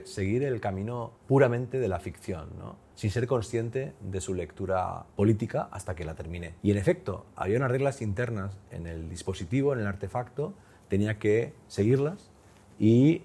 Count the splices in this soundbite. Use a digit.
4